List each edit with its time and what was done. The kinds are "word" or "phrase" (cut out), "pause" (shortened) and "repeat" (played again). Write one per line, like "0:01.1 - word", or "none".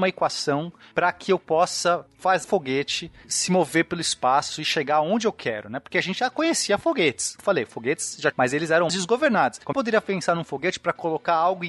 0:02.4 - word
0:07.4 - word
0:08.3 - phrase
0:08.9 - word
0:09.7 - phrase

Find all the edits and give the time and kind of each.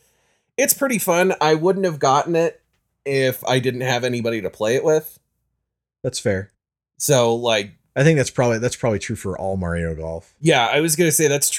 none

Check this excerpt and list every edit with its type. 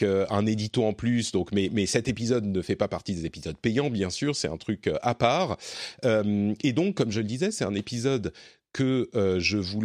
none

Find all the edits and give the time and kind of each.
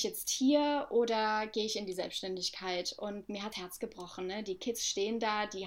0:03.5 - word

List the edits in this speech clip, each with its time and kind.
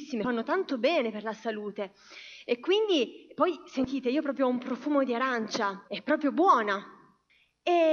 0:05.9 - pause

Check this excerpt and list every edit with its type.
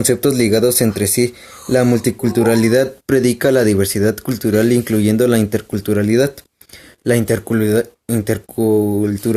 none

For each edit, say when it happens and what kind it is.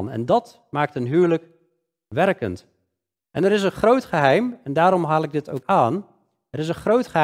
0:05.6 - word

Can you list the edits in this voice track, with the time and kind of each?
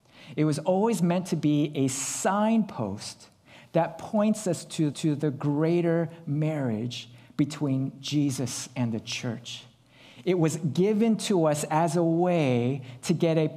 0:04.9 - repeat

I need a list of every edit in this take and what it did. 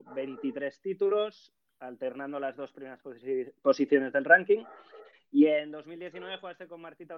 none

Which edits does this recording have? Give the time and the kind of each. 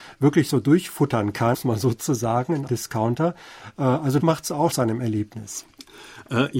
0:01.5 - word
0:02.7 - word
0:04.2 - word
0:04.7 - word

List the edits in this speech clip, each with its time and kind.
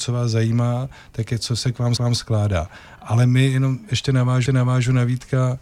0:02.0 - repeat
0:04.5 - repeat

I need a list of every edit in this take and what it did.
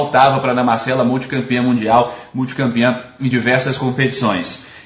none

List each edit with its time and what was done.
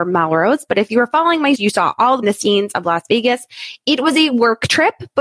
0:01.5 - word
0:02.2 - word

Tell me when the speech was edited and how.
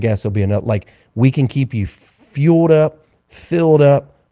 none

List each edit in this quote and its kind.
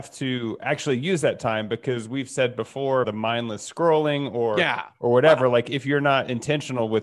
0:03.0 - word

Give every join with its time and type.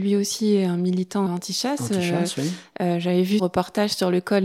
0:01.3 - word
0:03.4 - word

